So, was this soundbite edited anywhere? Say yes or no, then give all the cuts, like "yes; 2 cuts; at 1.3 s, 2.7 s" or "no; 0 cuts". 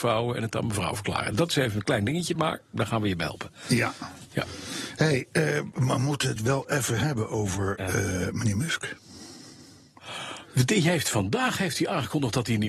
no; 0 cuts